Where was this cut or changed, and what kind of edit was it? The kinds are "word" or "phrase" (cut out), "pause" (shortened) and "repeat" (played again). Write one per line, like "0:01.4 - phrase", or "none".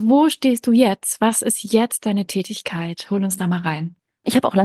none